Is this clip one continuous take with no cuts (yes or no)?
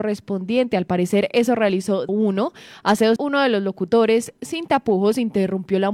no